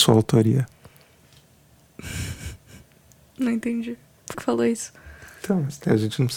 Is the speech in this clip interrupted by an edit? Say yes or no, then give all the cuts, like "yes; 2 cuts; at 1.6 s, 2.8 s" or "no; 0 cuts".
yes; 1 cut; at 4.3 s